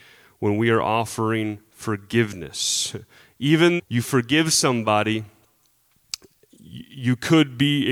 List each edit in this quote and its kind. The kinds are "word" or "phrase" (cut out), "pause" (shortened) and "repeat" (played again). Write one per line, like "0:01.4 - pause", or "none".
0:03.8 - word